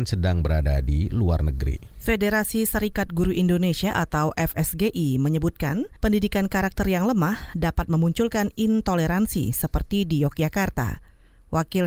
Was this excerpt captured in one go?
no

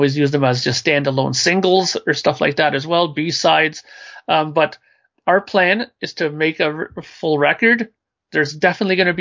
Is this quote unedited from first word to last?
yes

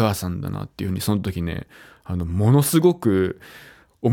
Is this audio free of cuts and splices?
yes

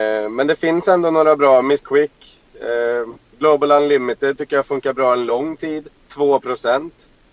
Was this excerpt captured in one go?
no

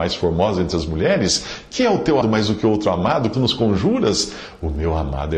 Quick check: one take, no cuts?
no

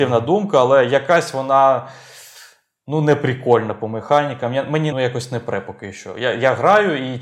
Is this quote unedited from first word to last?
no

